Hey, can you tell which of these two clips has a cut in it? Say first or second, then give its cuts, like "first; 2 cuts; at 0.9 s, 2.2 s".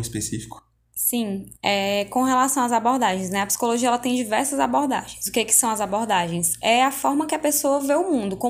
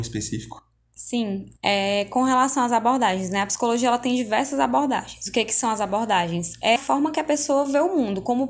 second; 1 cut; at 6.8 s